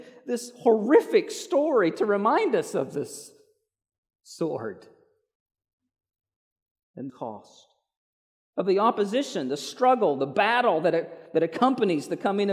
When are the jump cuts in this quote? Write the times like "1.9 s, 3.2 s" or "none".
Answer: 7.1 s

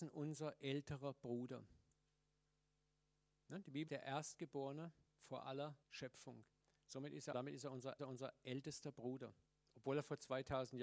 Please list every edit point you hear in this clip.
3.9 s, 5.8 s, 7.3 s, 8.0 s, 9.5 s

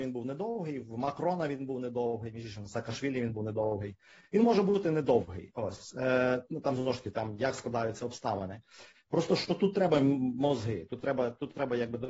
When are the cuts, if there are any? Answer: none

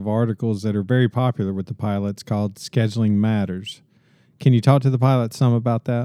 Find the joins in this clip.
none

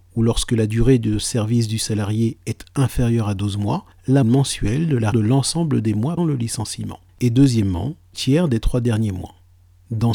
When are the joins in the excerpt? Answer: 4.2 s, 5.1 s, 6.2 s, 7.1 s, 8.1 s

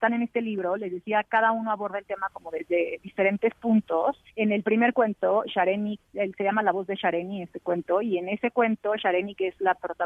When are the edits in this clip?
4.3 s

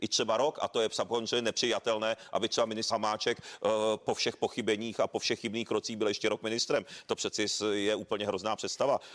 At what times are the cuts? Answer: 2.9 s, 4.0 s

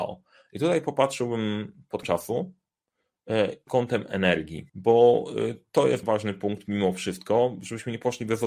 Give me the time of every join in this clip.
2.0 s, 3.7 s, 4.7 s, 6.0 s

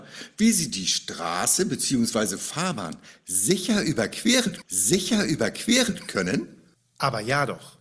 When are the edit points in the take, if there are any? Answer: 4.6 s

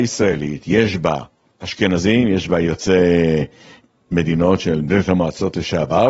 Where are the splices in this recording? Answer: none

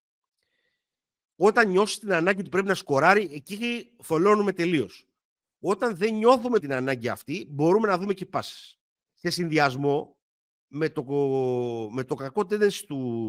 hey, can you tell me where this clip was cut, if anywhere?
6.6 s, 9.0 s

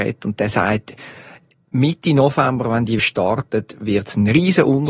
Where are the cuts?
3.0 s

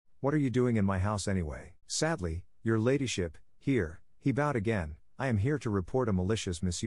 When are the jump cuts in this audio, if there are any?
1.8 s

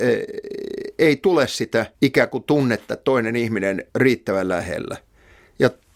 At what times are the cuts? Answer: 1.9 s, 3.9 s

